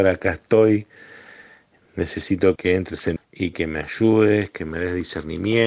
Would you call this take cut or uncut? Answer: cut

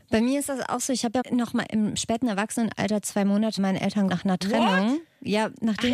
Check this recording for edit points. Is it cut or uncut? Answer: cut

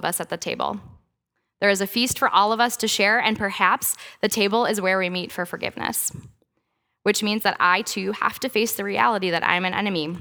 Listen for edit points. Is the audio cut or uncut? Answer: uncut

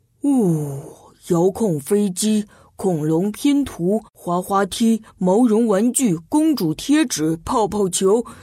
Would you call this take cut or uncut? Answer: cut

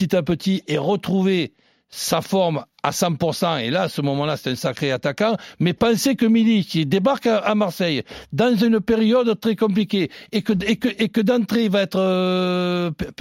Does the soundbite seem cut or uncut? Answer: uncut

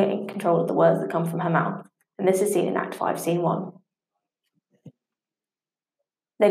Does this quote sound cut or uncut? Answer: uncut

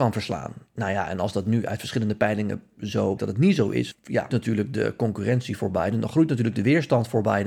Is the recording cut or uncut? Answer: cut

